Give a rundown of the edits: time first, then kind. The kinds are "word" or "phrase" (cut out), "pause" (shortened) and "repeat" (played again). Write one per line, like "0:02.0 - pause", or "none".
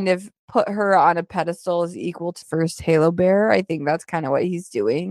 0:02.4 - word